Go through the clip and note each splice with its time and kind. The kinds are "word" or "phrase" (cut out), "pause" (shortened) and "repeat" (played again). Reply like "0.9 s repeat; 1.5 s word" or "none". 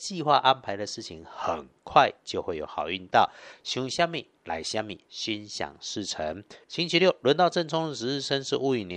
6.6 s pause